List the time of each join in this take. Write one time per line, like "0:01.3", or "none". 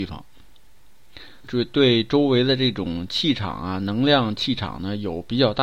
0:01.4